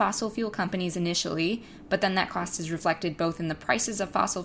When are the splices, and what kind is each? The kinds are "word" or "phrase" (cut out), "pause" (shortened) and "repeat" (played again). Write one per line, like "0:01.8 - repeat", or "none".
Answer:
none